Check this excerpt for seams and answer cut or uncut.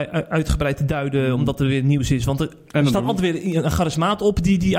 uncut